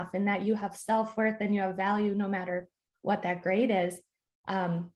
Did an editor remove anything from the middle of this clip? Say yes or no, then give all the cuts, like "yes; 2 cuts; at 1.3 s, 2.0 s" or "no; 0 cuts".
no; 0 cuts